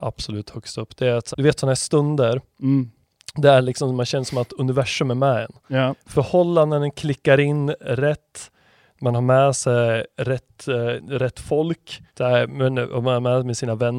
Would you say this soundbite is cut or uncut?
cut